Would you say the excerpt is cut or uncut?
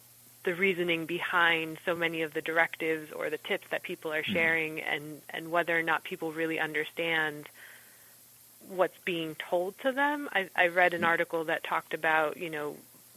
uncut